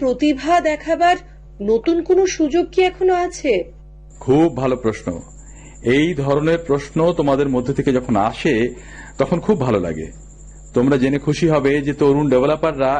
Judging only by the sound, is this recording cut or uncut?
uncut